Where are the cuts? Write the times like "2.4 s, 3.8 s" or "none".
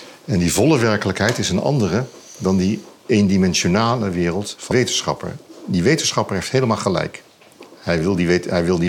4.7 s